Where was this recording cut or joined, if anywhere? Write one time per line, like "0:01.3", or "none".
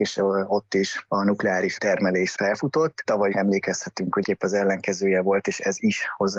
0:01.1
0:01.8
0:02.3
0:03.3
0:04.2